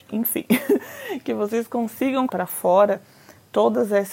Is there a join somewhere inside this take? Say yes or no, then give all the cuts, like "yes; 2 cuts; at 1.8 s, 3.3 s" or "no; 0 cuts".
yes; 1 cut; at 2.3 s